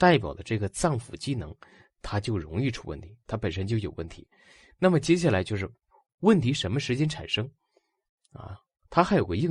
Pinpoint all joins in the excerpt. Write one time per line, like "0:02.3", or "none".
none